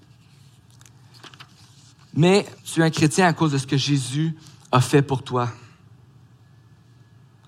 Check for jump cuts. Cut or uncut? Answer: cut